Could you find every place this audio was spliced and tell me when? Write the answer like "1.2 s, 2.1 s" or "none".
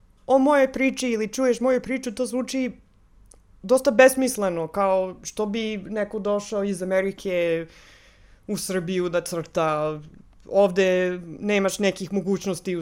none